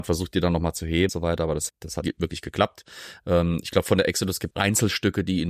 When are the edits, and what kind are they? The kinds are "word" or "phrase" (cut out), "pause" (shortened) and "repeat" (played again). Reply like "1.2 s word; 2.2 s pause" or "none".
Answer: 1.1 s word; 1.7 s word; 2.0 s word; 4.5 s word